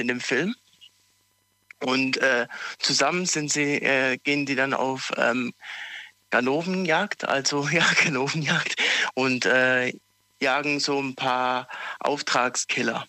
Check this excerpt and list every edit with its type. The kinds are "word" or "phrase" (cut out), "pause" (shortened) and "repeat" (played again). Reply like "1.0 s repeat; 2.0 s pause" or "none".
none